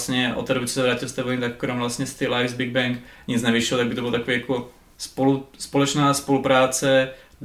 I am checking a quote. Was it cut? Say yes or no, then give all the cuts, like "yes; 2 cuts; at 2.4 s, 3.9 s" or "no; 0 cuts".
no; 0 cuts